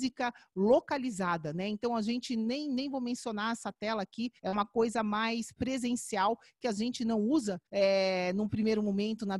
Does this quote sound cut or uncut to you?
cut